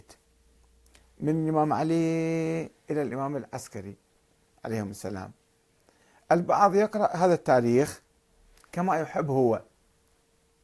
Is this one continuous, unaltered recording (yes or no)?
yes